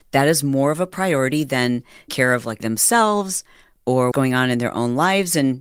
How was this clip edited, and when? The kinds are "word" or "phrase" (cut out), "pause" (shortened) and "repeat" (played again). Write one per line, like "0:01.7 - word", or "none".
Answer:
0:02.1 - word
0:02.6 - word
0:04.1 - word

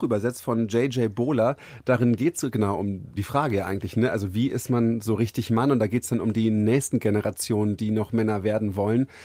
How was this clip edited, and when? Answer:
0:03.2 - word

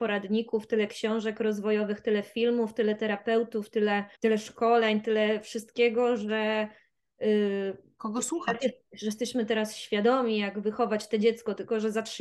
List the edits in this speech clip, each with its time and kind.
0:04.1 - pause

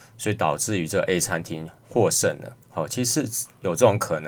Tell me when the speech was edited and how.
0:01.8 - pause
0:02.6 - pause

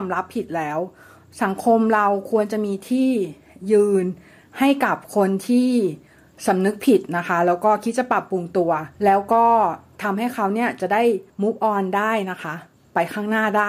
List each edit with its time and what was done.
0:08.9 - pause
0:11.3 - pause

